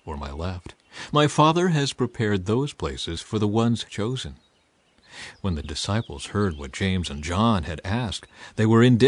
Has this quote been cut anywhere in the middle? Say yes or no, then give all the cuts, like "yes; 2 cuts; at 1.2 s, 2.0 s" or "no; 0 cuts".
yes; 2 cuts; at 3.9 s, 5.6 s